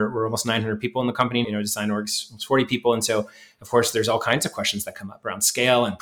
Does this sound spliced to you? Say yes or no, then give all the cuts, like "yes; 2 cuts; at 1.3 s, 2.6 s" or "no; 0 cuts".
yes; 1 cut; at 1.4 s